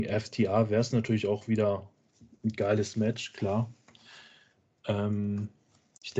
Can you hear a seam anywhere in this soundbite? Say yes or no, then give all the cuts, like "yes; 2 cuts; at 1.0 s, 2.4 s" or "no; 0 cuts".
no; 0 cuts